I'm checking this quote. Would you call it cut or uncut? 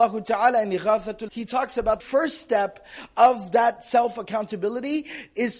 cut